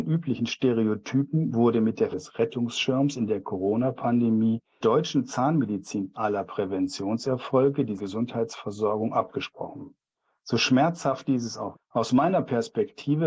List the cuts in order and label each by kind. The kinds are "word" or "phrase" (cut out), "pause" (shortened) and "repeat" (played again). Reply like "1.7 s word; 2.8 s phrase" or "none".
2.1 s word; 4.8 s word; 6.1 s word; 8.0 s phrase; 10.1 s pause; 11.7 s word

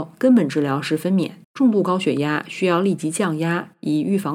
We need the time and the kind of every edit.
1.4 s pause

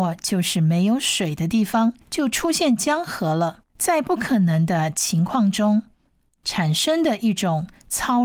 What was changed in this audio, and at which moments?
2.0 s pause; 3.7 s pause

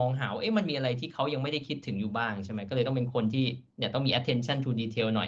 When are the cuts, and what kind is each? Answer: 3.7 s pause

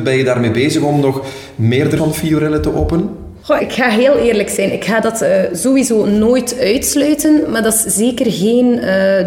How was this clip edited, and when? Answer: 2.0 s word; 3.6 s word

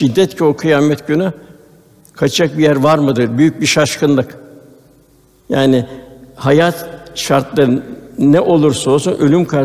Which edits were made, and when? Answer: none

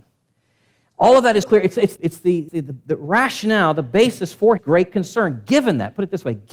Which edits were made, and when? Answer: 1.4 s word; 2.0 s word; 2.5 s word; 4.6 s word

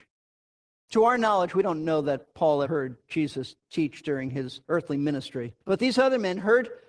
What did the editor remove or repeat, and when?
2.6 s word; 4.6 s pause; 5.6 s pause

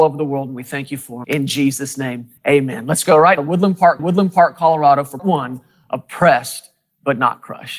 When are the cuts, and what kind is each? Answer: 1.2 s word; 2.4 s pause; 3.4 s word; 4.0 s repeat; 5.2 s word

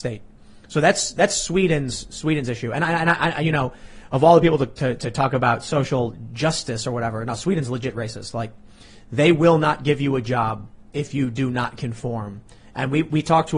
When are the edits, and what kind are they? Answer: none

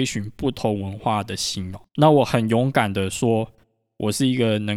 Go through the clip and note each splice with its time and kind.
1.9 s pause

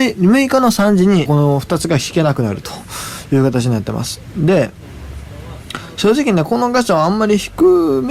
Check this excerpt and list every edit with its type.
1.3 s phrase

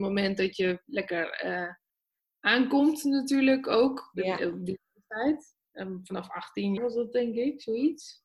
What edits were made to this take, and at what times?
6.8 s word

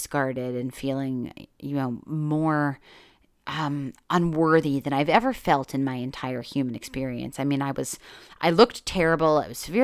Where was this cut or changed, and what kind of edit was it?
none

